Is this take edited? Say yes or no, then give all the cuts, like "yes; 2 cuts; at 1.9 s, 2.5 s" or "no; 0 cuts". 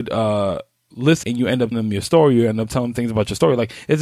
yes; 2 cuts; at 1.2 s, 1.7 s